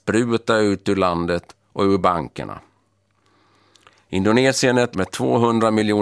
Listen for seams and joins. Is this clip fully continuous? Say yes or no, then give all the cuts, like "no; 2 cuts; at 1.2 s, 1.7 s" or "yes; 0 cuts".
no; 1 cut; at 4.9 s